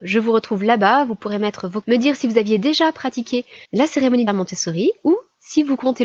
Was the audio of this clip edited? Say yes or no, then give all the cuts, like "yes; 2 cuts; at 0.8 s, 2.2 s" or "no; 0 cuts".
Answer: yes; 3 cuts; at 1.8 s, 3.6 s, 4.3 s